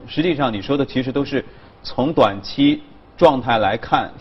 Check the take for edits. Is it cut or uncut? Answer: uncut